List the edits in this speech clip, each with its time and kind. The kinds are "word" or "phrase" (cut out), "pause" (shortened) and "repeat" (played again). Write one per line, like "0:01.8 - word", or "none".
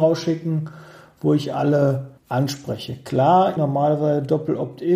0:02.2 - pause
0:03.6 - word

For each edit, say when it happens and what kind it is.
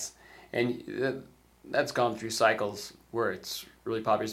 none

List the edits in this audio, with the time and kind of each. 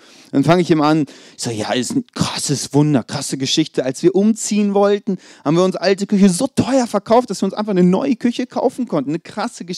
none

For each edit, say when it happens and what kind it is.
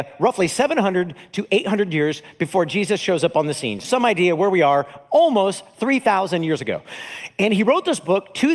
0:03.8 - phrase

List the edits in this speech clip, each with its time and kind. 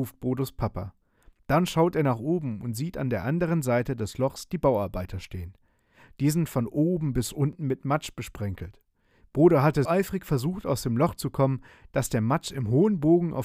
0:09.8 - word

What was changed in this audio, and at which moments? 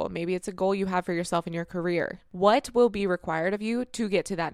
none

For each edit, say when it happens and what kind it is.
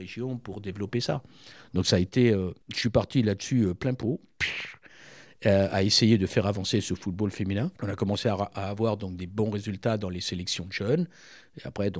0:02.6 - pause
0:07.8 - pause

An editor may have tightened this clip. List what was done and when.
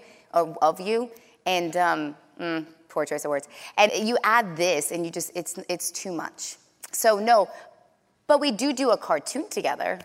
0:03.9 - word

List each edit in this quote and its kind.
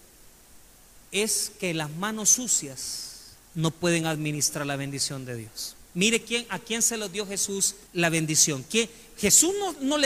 0:01.1 - pause
0:03.4 - pause
0:05.9 - pause
0:07.9 - pause

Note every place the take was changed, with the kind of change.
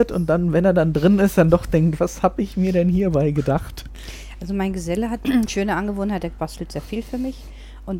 0:05.2 - word

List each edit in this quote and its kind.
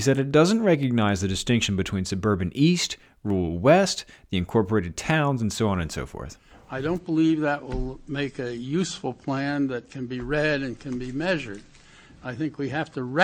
none

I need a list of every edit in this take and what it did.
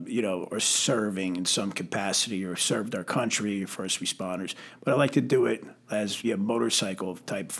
0:06.2 - word

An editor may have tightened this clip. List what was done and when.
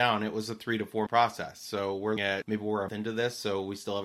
0:01.1 - word
0:02.2 - word
0:02.9 - word

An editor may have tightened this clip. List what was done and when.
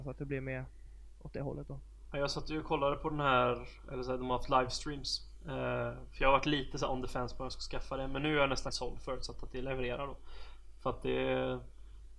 0:08.7 - word

